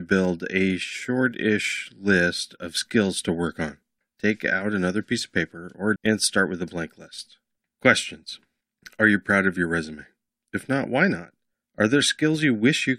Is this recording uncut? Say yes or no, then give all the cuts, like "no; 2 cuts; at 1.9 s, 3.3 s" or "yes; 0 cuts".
no; 1 cut; at 6.0 s